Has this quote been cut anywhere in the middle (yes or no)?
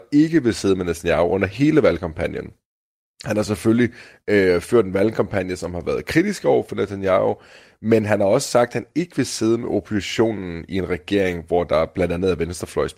no